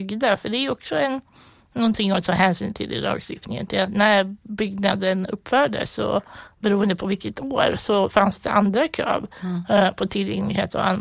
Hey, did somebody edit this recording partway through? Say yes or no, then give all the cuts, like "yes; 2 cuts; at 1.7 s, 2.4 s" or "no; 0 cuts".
no; 0 cuts